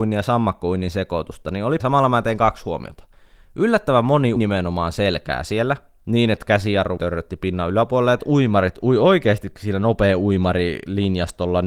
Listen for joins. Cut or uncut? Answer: cut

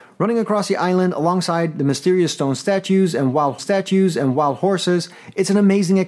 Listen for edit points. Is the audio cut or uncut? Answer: cut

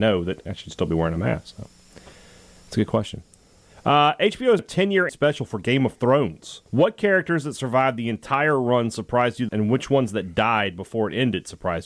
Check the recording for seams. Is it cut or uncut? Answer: cut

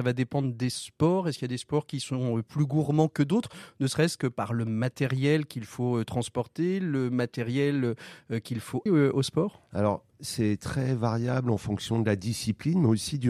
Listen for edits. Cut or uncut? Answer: cut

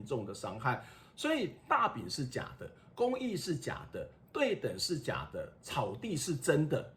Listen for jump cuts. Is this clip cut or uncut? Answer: uncut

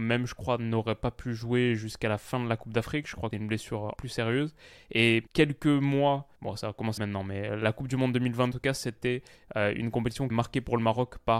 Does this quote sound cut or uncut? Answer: cut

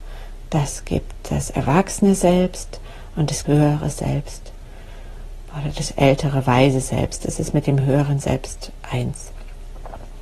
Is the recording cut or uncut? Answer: cut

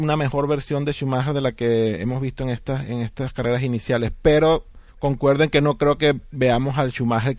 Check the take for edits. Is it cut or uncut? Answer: cut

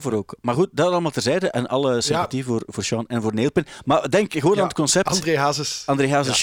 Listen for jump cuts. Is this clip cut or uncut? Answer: uncut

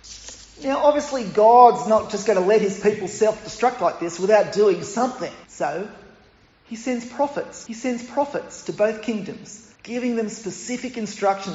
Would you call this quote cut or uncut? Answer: cut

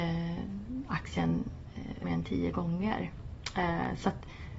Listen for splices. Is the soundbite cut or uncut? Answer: cut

